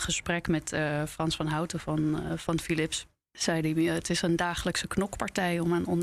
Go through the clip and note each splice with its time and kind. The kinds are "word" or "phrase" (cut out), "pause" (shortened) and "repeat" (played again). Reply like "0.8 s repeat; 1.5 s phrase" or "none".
none